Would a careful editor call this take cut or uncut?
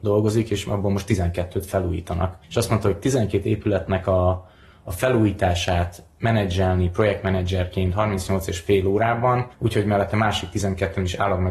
cut